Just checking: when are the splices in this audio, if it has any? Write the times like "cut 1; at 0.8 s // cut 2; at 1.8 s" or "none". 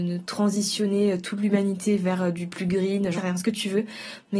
cut 1; at 3.2 s